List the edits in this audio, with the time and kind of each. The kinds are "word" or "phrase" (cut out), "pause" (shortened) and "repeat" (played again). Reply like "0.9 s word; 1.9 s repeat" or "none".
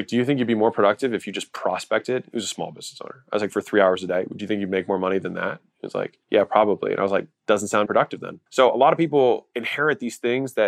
6.2 s pause; 7.9 s word; 8.5 s pause